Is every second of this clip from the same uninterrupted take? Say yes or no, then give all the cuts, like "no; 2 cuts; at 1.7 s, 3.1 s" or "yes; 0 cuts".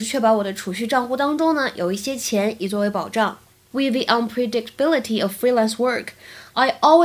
yes; 0 cuts